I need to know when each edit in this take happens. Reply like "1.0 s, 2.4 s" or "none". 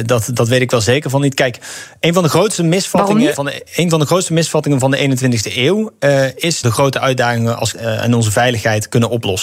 3.3 s, 3.7 s, 6.6 s, 7.7 s